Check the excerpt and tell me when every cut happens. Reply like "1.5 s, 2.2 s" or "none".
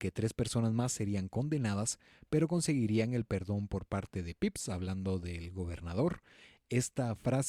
none